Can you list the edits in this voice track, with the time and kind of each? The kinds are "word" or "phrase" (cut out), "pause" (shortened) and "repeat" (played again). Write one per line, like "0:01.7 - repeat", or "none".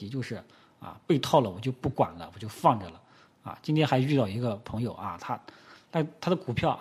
none